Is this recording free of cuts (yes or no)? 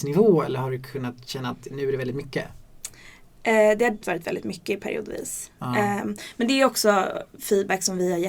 no